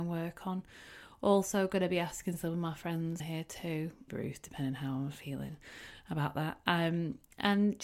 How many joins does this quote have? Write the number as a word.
two